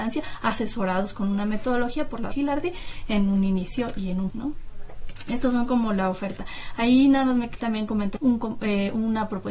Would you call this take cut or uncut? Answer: cut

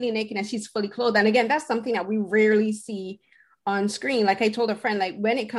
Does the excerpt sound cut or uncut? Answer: uncut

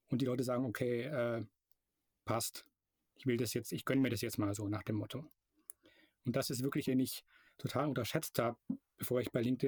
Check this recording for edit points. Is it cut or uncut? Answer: cut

